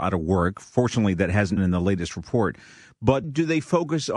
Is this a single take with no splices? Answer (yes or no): no